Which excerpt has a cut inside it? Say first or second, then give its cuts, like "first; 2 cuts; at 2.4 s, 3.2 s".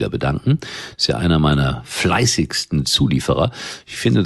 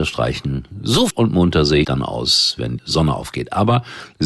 second; 3 cuts; at 1.1 s, 1.8 s, 2.8 s